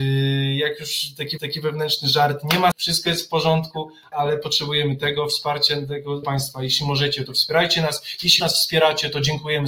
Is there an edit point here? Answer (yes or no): yes